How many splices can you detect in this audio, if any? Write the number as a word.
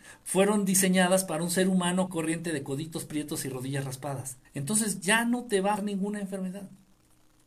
three